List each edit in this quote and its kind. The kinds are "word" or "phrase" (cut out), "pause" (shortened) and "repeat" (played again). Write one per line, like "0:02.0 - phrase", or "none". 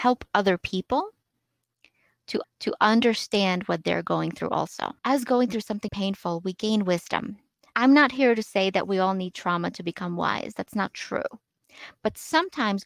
0:02.4 - repeat
0:05.0 - pause
0:05.9 - word
0:07.7 - word